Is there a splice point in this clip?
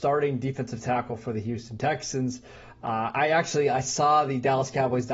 no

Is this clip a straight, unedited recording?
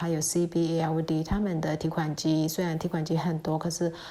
yes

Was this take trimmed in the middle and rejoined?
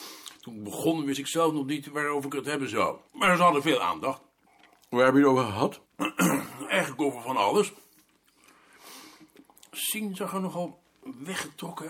yes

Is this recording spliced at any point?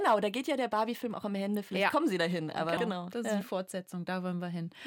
yes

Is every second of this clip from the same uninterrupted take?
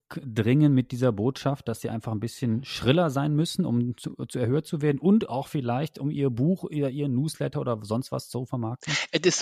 yes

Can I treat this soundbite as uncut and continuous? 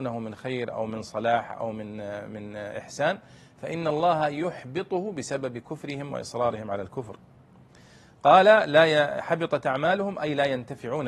yes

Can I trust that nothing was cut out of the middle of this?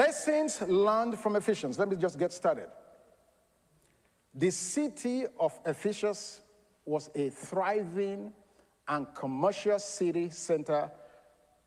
yes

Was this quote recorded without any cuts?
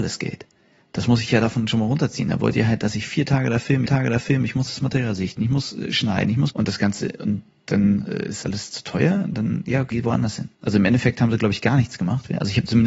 no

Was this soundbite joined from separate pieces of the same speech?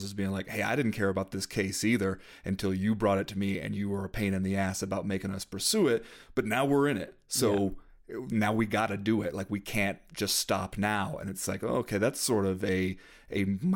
no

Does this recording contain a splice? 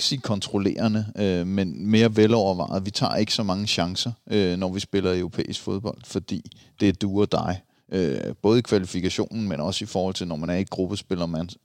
no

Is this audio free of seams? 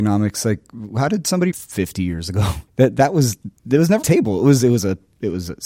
no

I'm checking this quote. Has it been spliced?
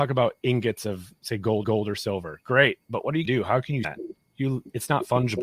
yes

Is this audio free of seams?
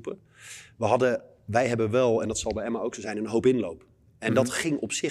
yes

